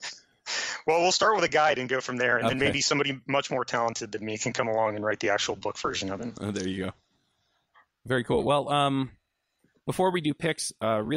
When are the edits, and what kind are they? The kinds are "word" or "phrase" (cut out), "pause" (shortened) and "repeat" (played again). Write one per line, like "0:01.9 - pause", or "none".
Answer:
none